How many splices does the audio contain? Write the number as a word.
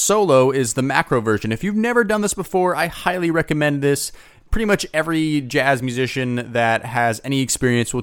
zero